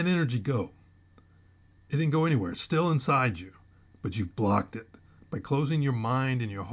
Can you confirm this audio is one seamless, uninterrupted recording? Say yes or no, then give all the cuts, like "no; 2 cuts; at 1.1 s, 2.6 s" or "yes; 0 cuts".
yes; 0 cuts